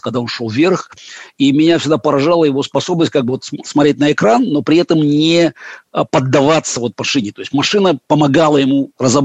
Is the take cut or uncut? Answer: uncut